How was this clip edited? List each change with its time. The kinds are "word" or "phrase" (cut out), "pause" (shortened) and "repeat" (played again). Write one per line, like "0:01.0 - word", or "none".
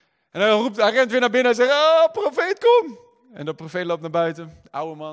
none